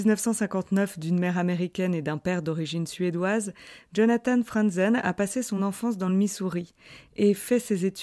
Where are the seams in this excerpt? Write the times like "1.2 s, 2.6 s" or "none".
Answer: none